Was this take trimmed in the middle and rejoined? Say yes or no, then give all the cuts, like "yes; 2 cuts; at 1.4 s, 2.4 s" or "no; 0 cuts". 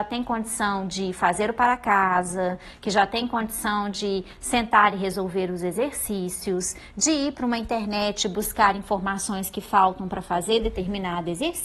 no; 0 cuts